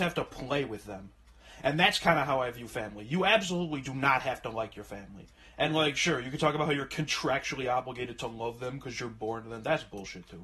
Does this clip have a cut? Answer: no; 0 cuts

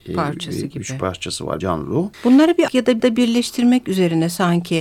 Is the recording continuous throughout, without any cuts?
no; 4 cuts; at 1.6 s, 2.1 s, 2.7 s, 3.0 s

